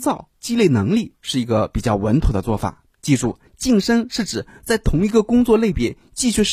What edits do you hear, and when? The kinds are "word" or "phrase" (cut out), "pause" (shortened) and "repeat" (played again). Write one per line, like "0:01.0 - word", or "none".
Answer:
0:02.9 - pause
0:03.5 - pause